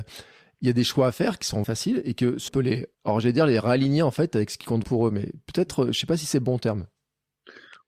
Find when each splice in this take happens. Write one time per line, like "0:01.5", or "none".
0:01.6
0:02.5
0:02.9
0:04.8